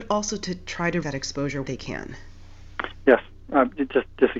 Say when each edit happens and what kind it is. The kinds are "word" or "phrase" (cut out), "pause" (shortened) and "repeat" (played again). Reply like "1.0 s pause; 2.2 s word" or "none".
1.0 s word; 1.6 s word